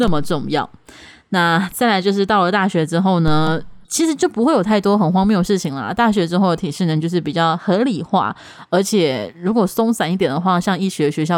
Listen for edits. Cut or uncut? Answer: cut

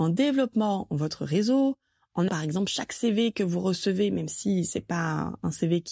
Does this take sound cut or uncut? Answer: cut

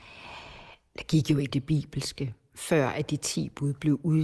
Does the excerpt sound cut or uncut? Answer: cut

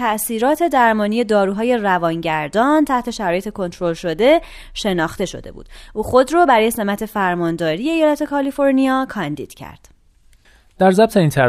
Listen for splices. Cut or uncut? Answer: uncut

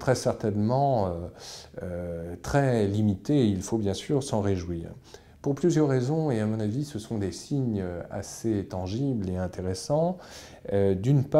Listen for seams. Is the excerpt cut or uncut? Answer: uncut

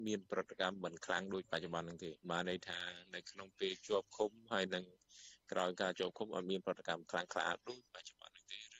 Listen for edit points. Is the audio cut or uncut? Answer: cut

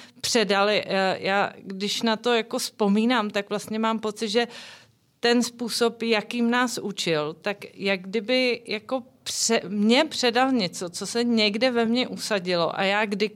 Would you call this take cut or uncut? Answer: uncut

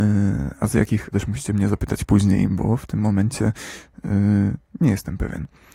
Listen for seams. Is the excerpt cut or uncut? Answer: cut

